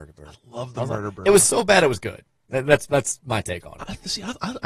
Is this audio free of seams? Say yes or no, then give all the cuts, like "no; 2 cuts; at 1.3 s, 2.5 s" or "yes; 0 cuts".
yes; 0 cuts